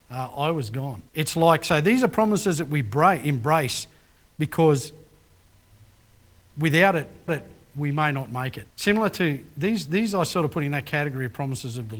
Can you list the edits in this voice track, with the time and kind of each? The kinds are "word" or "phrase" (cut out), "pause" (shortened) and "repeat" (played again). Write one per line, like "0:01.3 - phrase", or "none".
0:01.1 - pause
0:07.3 - repeat
0:08.7 - pause